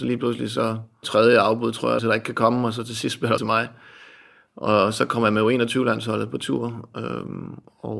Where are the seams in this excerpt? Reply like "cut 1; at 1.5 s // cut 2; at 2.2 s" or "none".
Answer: cut 1; at 1.0 s // cut 2; at 2.0 s // cut 3; at 3.4 s